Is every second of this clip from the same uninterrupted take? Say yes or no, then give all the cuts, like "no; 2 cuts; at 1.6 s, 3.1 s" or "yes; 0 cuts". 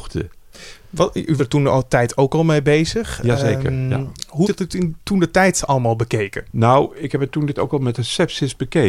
no; 4 cuts; at 1.4 s, 4.4 s, 7.5 s, 8.0 s